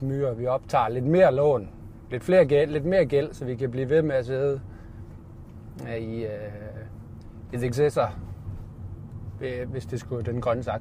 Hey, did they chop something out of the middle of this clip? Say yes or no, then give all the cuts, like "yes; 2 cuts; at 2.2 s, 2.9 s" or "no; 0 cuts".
yes; 1 cut; at 7.7 s